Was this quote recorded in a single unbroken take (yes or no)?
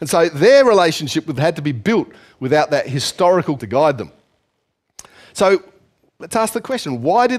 no